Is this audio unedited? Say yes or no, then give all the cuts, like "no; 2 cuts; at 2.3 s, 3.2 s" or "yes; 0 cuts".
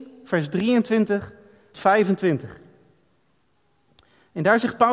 no; 1 cut; at 1.7 s